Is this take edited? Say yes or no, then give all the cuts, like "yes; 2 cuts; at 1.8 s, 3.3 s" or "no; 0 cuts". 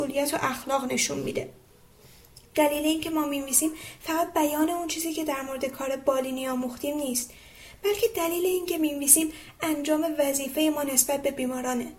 no; 0 cuts